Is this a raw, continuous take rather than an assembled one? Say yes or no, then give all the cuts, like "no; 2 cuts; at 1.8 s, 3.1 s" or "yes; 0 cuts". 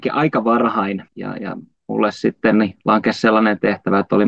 no; 1 cut; at 1.1 s